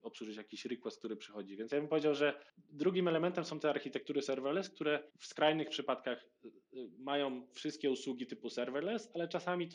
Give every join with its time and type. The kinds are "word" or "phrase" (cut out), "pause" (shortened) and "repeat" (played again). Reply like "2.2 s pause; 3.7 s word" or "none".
2.5 s pause; 5.1 s pause